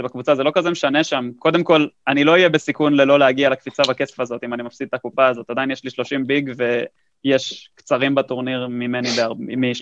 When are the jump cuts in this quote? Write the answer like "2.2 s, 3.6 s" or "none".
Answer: none